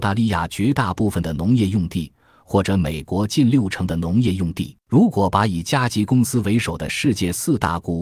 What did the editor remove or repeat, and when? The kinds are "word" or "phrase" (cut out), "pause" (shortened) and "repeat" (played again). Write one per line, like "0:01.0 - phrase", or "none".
0:04.8 - pause